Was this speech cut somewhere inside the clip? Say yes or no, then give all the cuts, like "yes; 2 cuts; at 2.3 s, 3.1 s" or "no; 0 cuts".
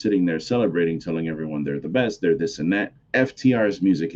yes; 1 cut; at 3.0 s